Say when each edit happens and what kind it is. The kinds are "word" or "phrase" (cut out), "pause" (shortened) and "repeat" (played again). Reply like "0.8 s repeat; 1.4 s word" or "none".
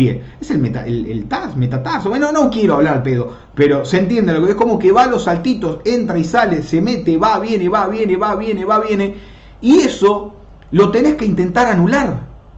none